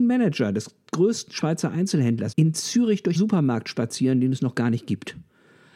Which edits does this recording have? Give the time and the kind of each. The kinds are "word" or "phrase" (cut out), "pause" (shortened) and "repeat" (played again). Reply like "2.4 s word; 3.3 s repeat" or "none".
2.3 s word; 3.1 s word